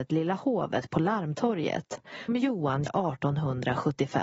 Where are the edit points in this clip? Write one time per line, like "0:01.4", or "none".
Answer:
0:02.3
0:02.9

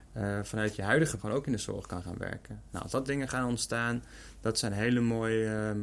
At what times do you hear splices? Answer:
0:01.2
0:03.1

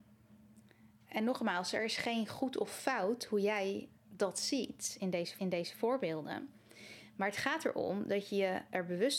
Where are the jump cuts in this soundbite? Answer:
0:04.0
0:05.4

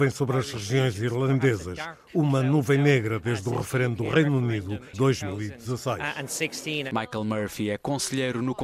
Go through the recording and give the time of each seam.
0:04.9

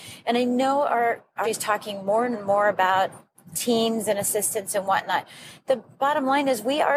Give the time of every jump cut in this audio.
0:01.4
0:02.3

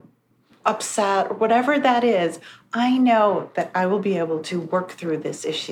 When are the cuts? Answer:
none

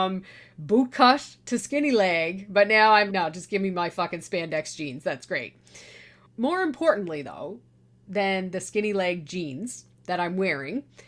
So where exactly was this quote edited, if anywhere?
0:03.1

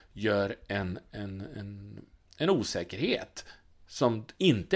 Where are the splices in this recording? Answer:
none

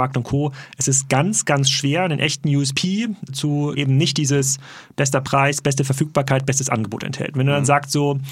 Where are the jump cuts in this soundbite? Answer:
0:03.3
0:03.8

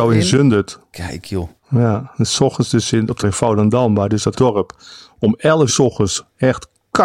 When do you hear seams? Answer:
0:01.6
0:03.2
0:04.3
0:05.7

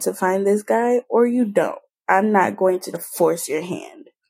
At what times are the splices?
0:02.9

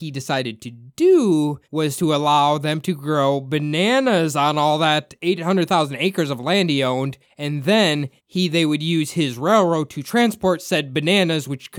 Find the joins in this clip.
0:01.6
0:07.2
0:08.2

